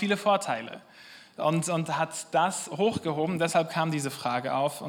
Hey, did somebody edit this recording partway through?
no; 0 cuts

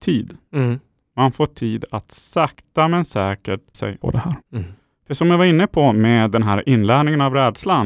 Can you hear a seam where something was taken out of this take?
yes; 2 cuts; at 3.7 s, 4.4 s

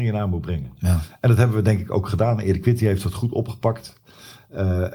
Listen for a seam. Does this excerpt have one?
no; 0 cuts

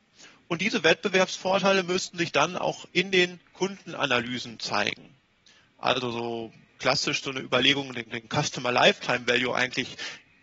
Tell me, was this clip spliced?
yes; 2 cuts; at 2.9 s, 8.1 s

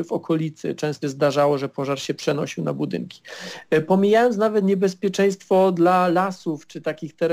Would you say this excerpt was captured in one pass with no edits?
no; 1 cut; at 1.0 s

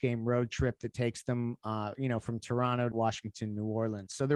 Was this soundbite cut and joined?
yes; 1 cut; at 2.9 s

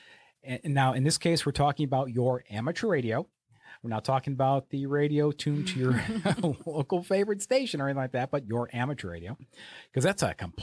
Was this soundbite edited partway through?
no; 0 cuts

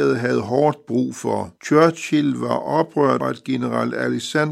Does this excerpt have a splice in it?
yes; 2 cuts; at 1.6 s, 3.2 s

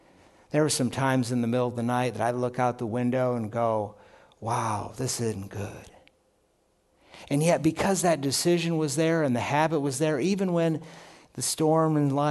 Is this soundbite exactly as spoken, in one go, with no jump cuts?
yes; 0 cuts

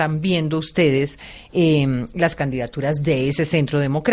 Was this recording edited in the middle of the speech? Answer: no; 0 cuts

